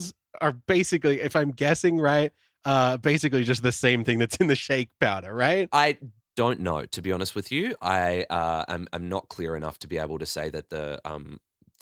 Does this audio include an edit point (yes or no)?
no